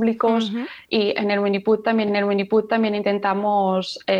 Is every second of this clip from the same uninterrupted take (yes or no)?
no